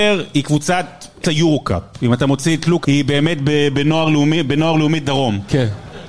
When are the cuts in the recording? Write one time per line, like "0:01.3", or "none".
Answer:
0:01.2
0:02.8

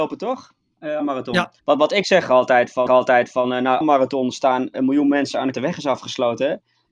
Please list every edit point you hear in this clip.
0:01.0
0:01.6
0:02.9
0:03.8
0:04.7
0:05.5

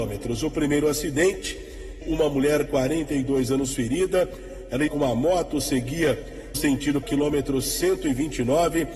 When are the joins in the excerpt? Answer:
0:02.0
0:02.7
0:04.9
0:06.5
0:07.0

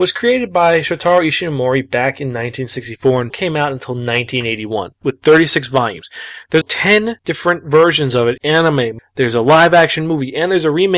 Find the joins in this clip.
0:03.3
0:05.0
0:06.6
0:08.4
0:09.0

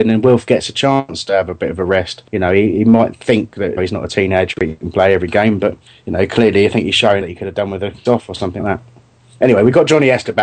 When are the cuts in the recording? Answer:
0:02.3
0:03.8
0:05.9
0:07.2
0:08.0
0:08.6

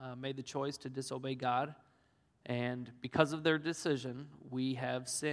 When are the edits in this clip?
none

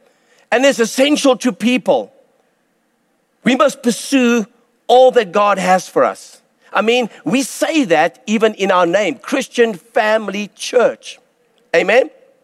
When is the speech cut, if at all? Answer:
none

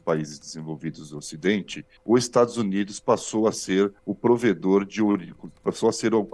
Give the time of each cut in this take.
0:02.0
0:04.0

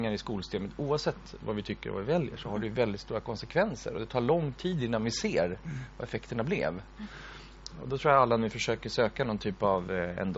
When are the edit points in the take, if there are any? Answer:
none

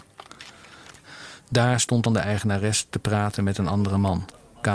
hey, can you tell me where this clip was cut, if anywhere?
0:02.1

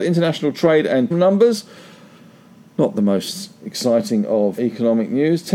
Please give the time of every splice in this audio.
0:01.1
0:04.6

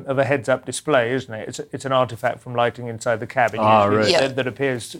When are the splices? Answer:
none

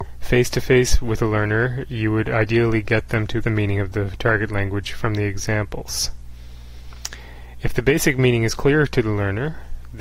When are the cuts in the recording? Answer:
0:03.4

